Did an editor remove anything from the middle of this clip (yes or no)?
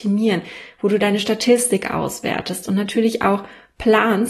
no